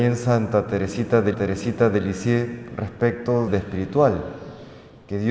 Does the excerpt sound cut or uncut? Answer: cut